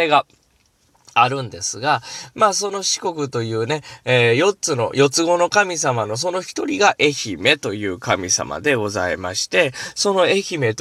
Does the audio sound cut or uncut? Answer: uncut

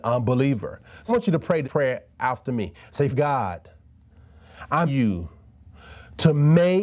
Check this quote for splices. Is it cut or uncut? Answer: cut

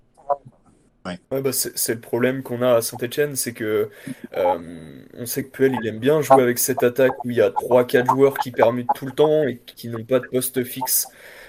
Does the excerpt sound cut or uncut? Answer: cut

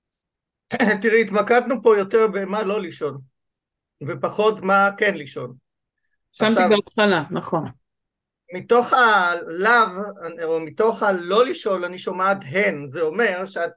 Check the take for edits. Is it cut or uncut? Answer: uncut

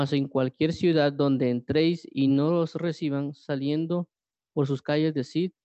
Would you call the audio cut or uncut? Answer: uncut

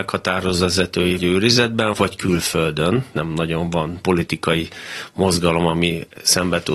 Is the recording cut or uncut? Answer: cut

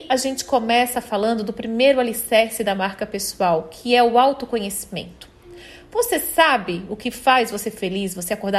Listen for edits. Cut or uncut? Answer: uncut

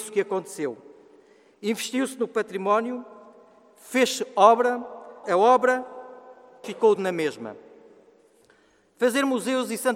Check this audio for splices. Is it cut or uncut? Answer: cut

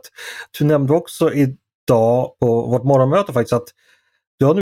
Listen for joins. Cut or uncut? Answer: uncut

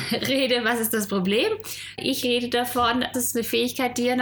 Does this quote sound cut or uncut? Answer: cut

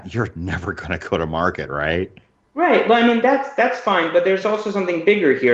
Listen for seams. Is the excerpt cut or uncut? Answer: uncut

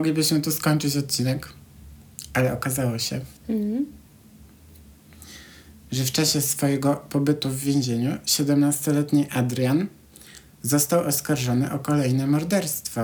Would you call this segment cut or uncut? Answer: cut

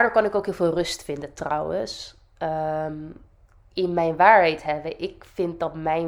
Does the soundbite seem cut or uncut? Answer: uncut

